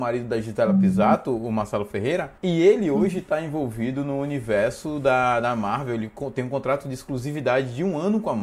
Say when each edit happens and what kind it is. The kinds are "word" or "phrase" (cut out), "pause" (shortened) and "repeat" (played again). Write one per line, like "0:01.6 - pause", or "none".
0:02.4 - pause